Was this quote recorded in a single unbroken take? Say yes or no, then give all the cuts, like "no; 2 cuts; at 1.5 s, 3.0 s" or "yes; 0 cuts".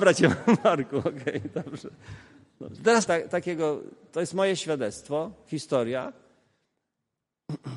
no; 1 cut; at 3.1 s